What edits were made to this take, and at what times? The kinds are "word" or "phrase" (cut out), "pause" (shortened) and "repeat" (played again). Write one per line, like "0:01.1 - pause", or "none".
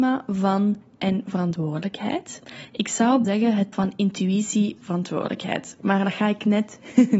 0:01.0 - word
0:03.2 - word
0:03.7 - word
0:04.8 - word